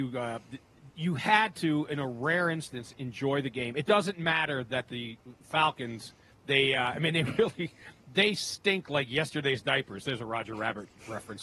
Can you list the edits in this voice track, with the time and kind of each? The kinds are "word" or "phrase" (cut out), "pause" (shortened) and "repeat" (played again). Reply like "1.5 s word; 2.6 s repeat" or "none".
none